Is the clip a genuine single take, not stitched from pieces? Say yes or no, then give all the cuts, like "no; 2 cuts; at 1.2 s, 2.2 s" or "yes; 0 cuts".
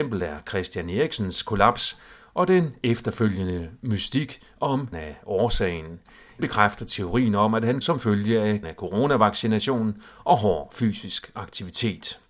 no; 4 cuts; at 4.9 s, 6.4 s, 7.8 s, 8.6 s